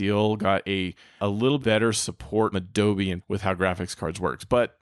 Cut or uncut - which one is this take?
cut